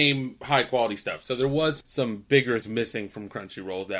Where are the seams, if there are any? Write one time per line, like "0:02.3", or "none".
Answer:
0:01.8
0:02.6